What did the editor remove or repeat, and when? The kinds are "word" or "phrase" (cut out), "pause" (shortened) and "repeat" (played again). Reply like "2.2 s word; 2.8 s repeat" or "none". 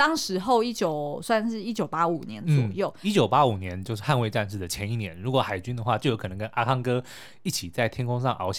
none